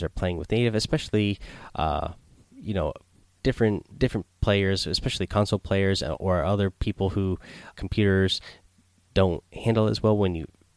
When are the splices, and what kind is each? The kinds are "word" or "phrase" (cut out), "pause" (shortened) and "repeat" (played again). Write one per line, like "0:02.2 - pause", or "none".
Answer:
0:02.4 - pause
0:03.9 - pause
0:07.7 - word